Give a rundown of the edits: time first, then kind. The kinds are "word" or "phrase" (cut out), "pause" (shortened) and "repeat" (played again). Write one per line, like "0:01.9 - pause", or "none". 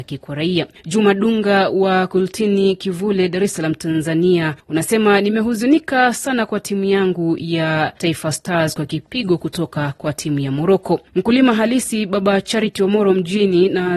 none